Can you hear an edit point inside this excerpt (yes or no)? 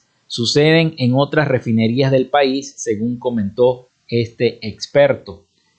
no